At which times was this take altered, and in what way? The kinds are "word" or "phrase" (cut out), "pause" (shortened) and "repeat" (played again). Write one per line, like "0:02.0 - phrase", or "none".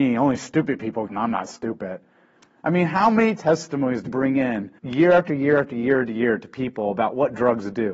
0:01.1 - phrase
0:04.1 - word
0:04.8 - pause